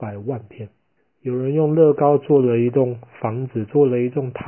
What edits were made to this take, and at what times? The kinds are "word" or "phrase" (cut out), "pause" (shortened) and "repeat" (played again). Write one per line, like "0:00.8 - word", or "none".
0:01.0 - pause